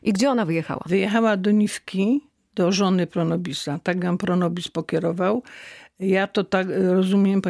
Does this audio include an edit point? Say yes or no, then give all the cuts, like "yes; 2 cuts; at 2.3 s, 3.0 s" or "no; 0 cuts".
no; 0 cuts